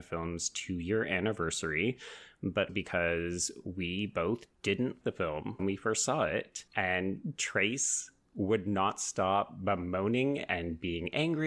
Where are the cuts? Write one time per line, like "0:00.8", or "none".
0:02.7
0:05.0
0:05.6
0:06.7